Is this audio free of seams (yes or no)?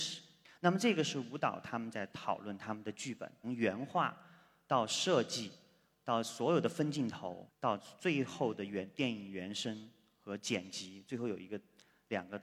yes